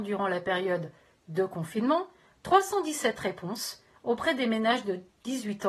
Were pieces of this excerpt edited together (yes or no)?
no